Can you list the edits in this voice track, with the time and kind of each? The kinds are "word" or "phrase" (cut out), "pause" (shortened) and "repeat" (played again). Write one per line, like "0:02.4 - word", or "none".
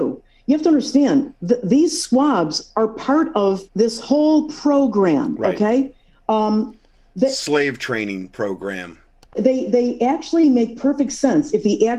0:03.7 - pause

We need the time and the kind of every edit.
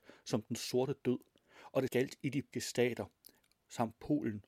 0:01.9 - word
0:02.5 - word

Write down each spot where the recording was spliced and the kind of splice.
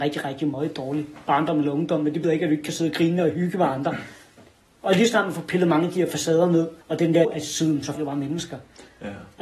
0:02.2 - word
0:06.8 - pause
0:07.2 - word
0:07.9 - word

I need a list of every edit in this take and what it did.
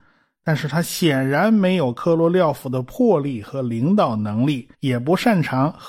0:04.7 - pause

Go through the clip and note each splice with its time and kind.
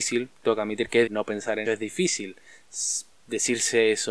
0:01.1 - word
0:01.6 - word

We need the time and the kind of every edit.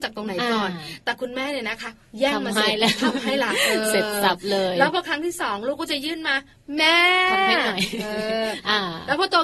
none

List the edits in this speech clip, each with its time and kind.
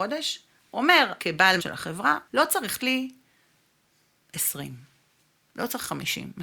0:01.2 - word
0:01.6 - word
0:02.3 - pause
0:02.8 - phrase

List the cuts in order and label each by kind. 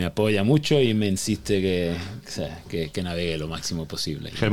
none

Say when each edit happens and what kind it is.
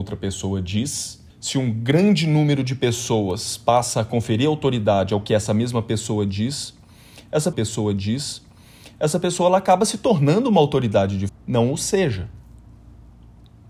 0:01.3 - pause
0:07.5 - repeat
0:11.3 - phrase

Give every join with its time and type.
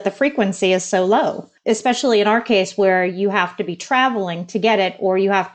0:01.6 - pause

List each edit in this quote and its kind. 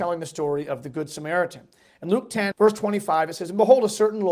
0:02.5 - word

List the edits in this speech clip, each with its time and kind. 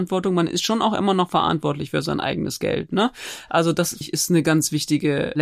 0:04.0 - word

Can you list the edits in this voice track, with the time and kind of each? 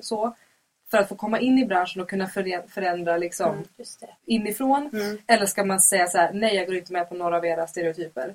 0:04.2 - pause

